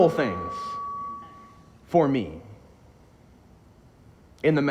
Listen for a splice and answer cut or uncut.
uncut